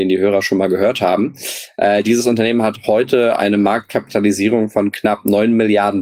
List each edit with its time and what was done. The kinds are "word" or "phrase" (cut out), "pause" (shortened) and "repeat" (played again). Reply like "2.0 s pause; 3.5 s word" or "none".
none